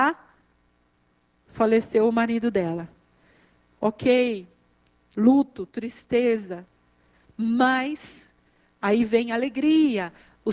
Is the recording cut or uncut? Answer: uncut